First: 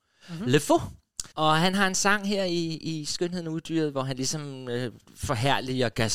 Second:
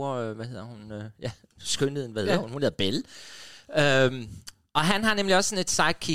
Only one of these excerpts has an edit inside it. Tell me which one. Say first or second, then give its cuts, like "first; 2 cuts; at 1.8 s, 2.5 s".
first; 1 cut; at 1.3 s